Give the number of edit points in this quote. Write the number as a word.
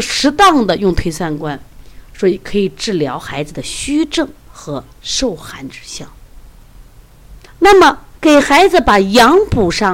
two